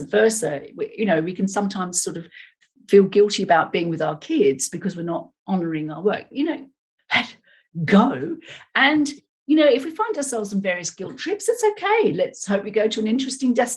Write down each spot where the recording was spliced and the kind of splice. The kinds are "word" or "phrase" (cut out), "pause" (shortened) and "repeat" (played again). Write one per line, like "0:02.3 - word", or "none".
0:06.3 - word
0:07.0 - word